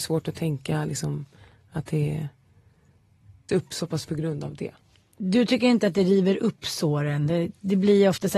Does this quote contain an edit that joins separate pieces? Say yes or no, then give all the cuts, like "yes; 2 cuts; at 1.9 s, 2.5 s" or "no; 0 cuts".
yes; 2 cuts; at 3.5 s, 4.1 s